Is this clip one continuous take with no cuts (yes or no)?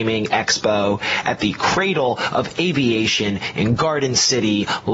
yes